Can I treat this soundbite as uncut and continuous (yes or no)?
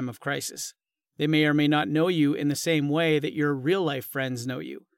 yes